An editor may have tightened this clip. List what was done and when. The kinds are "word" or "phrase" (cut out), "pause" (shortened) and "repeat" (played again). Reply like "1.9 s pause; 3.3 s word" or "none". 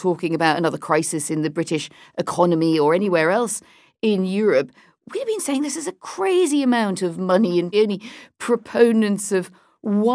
7.7 s word